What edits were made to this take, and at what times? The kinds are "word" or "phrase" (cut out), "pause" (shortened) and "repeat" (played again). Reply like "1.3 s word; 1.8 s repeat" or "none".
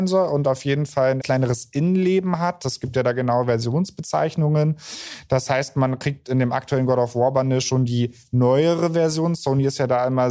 1.2 s word